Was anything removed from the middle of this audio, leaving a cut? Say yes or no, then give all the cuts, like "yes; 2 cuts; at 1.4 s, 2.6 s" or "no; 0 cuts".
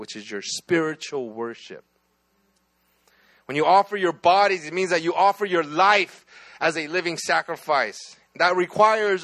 no; 0 cuts